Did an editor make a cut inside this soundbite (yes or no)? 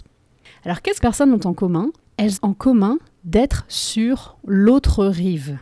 yes